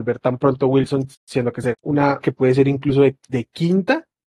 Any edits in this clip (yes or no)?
yes